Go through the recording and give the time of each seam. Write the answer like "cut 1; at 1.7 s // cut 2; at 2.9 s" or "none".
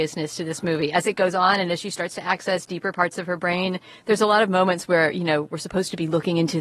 none